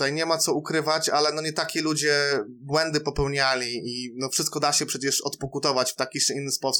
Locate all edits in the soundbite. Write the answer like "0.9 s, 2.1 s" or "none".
none